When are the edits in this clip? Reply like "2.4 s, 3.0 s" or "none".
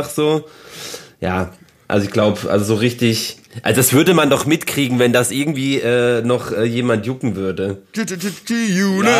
none